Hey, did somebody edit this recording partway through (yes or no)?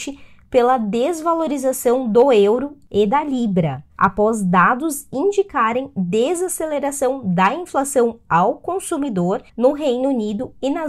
yes